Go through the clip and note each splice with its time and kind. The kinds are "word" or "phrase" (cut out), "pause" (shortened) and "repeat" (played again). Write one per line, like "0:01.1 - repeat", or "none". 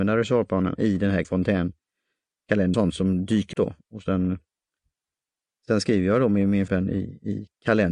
0:01.2 - word
0:02.7 - word
0:03.5 - word
0:06.7 - word